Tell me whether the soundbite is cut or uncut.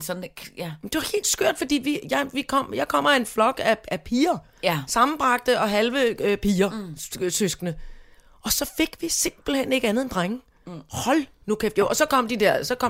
uncut